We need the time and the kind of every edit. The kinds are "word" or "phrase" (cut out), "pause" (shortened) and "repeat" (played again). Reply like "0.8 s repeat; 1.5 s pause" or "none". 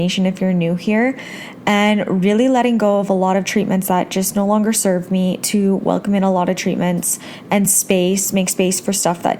none